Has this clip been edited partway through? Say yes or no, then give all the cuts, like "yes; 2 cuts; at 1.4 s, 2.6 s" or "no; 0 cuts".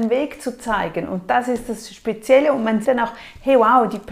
yes; 1 cut; at 2.8 s